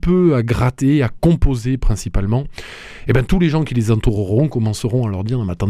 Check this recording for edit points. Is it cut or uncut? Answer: uncut